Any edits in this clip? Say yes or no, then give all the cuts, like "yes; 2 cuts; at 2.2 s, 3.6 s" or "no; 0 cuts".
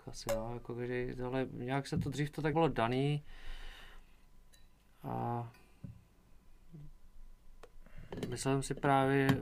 yes; 1 cut; at 2.5 s